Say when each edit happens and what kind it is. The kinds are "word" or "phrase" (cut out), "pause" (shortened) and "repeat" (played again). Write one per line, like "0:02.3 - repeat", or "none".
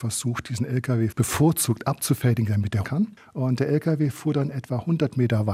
0:02.8 - word